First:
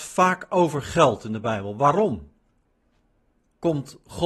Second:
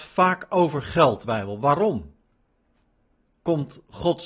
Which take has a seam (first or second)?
second